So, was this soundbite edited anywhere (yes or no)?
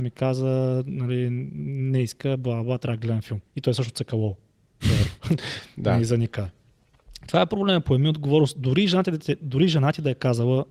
yes